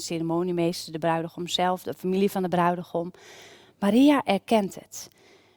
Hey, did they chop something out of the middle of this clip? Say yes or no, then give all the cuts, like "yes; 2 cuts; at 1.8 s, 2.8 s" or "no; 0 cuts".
no; 0 cuts